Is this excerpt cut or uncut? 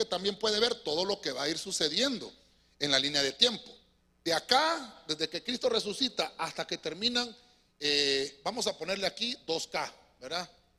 uncut